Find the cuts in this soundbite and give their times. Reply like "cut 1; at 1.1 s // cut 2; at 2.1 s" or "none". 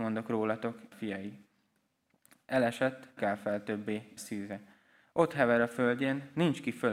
cut 1; at 0.9 s // cut 2; at 3.2 s // cut 3; at 4.2 s